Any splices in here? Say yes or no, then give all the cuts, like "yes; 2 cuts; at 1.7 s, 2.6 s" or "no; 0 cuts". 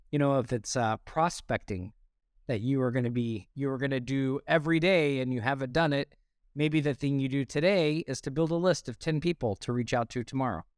no; 0 cuts